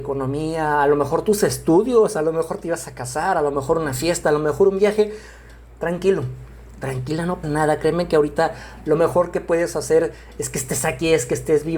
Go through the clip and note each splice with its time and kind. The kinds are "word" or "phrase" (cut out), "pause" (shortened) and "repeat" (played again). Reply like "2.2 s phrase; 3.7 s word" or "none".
7.4 s word

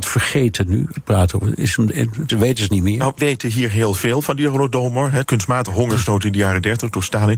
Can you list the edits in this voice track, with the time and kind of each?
1.0 s word; 2.3 s word; 2.7 s word; 3.2 s word; 5.2 s word; 5.7 s word

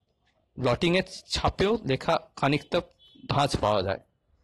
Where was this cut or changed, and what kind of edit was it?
1.2 s pause

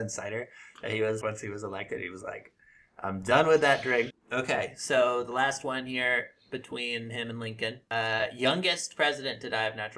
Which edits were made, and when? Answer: 1.2 s word

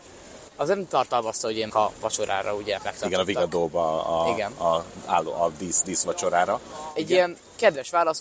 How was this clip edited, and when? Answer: 1.7 s word; 2.8 s word

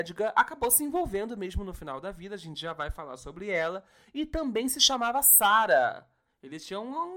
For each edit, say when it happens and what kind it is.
none

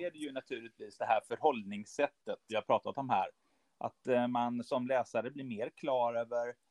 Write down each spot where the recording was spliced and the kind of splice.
2.5 s word

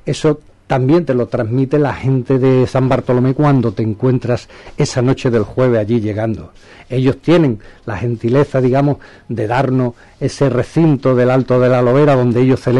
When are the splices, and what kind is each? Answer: none

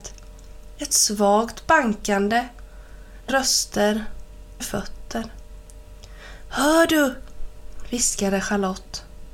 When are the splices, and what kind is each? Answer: 3.3 s word; 4.6 s word

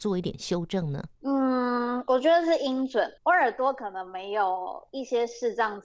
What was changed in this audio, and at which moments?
1.1 s pause; 3.2 s pause

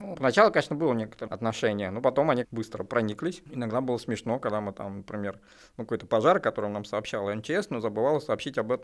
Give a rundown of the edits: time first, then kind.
1.3 s word; 2.4 s word

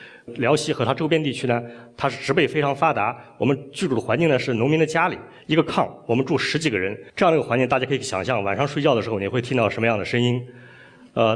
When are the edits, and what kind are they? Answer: 5.4 s pause; 7.1 s pause

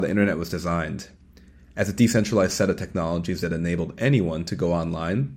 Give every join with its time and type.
none

